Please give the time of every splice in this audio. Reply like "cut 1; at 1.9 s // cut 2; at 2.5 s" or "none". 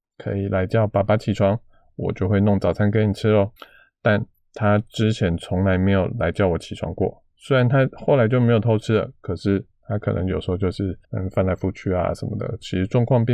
cut 1; at 3.6 s // cut 2; at 11.0 s